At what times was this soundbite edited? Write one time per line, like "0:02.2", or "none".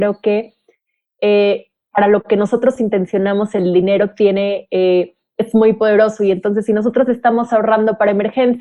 none